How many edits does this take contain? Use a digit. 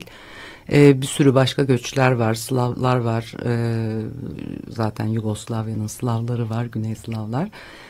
0